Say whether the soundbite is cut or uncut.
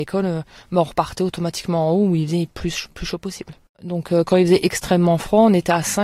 cut